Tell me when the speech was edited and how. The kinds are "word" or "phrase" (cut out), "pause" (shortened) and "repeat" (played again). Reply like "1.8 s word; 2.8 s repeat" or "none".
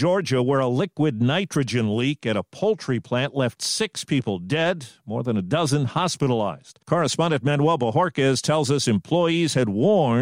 6.8 s pause